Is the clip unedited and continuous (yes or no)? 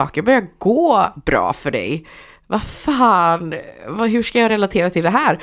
yes